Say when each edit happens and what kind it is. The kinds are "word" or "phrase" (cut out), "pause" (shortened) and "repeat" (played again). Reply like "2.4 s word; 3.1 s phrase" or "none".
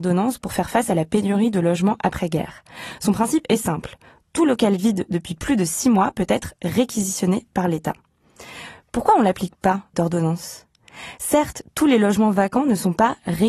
9.9 s word